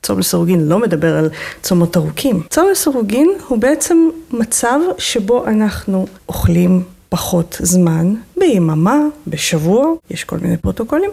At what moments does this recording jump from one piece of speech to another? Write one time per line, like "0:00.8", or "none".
0:02.5

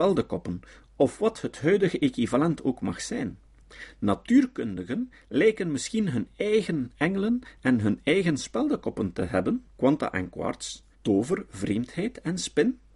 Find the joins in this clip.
0:09.7
0:10.9

